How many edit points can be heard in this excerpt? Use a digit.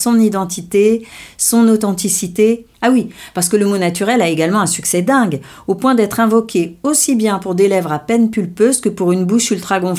1